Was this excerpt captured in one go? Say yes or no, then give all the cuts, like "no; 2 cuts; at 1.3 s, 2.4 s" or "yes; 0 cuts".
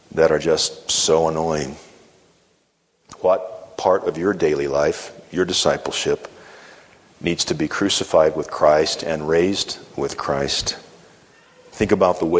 yes; 0 cuts